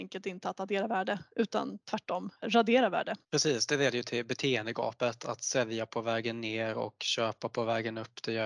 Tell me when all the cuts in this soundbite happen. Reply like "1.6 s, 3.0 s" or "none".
2.4 s, 3.2 s